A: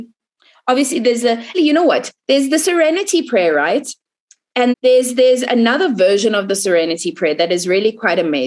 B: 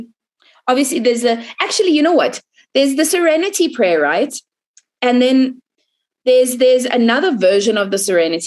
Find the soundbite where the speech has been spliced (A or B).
A